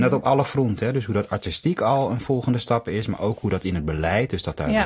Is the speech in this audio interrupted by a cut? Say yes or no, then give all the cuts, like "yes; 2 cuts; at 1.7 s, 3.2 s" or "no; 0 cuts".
no; 0 cuts